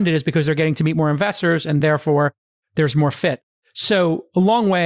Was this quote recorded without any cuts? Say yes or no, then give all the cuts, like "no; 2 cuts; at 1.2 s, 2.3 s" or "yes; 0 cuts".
yes; 0 cuts